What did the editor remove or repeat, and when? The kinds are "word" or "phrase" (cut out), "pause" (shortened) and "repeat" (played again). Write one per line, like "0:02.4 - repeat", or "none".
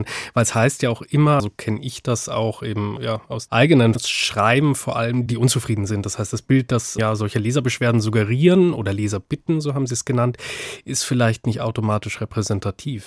0:01.4 - word
0:03.0 - word
0:03.5 - word
0:04.0 - word
0:05.3 - word
0:07.0 - word